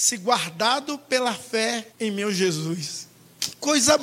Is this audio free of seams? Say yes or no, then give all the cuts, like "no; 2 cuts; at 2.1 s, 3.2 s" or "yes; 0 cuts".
no; 1 cut; at 1.9 s